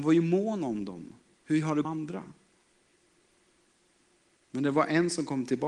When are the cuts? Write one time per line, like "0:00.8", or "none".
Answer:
0:01.8